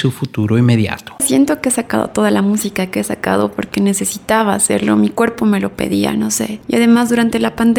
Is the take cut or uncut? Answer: uncut